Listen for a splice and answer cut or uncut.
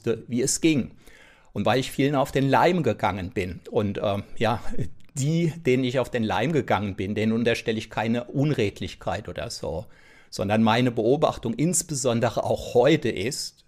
uncut